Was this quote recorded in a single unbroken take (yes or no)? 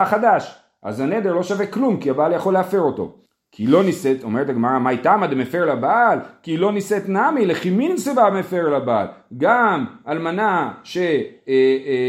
no